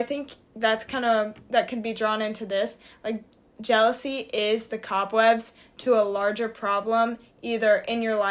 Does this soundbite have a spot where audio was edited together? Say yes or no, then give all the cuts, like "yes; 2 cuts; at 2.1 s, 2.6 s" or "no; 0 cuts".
no; 0 cuts